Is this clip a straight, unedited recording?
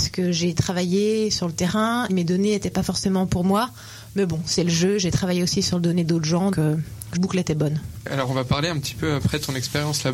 no; 3 cuts; at 2.1 s, 6.5 s, 7.1 s

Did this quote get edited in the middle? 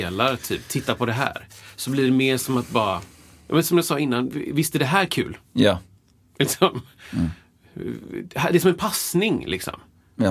no; 0 cuts

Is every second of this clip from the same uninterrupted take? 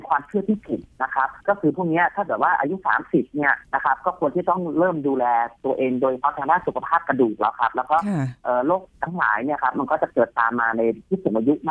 no; 4 cuts; at 0.9 s, 1.4 s, 3.7 s, 8.9 s

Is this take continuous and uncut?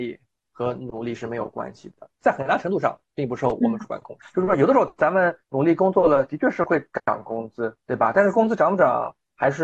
no; 2 cuts; at 2.2 s, 7.8 s

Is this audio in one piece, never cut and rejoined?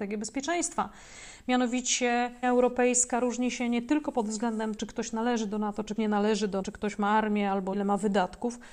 no; 5 cuts; at 2.4 s, 4.8 s, 6.0 s, 6.6 s, 7.7 s

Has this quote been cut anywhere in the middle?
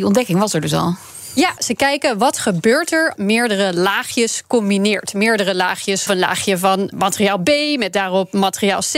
yes; 4 cuts; at 1.6 s, 3.1 s, 6.1 s, 6.9 s

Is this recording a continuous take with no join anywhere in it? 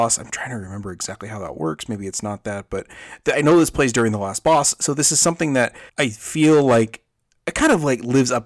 no; 1 cut; at 5.9 s

